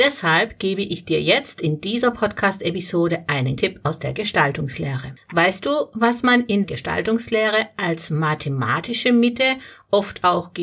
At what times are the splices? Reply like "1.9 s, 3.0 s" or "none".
3.6 s, 6.6 s